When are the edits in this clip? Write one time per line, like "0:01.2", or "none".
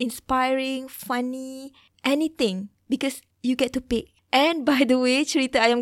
none

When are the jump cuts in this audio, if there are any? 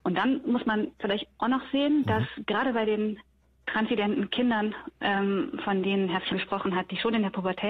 0:06.3

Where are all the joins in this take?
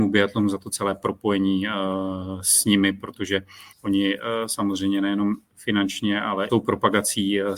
0:03.7
0:06.5

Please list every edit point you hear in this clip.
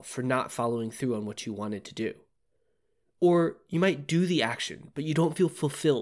none

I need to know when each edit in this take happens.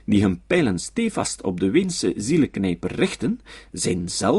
none

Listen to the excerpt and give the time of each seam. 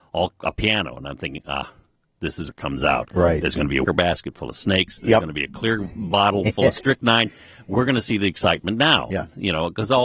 0:02.5
0:03.8

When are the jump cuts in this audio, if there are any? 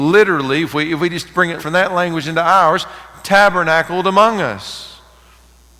0:01.6

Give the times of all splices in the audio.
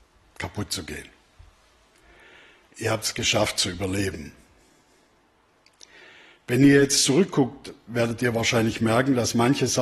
none

